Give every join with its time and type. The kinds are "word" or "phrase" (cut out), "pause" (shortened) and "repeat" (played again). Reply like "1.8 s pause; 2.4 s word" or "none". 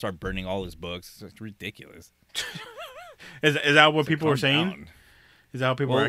none